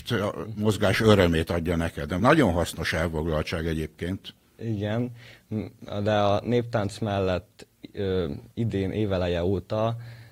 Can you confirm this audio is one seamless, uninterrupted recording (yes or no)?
no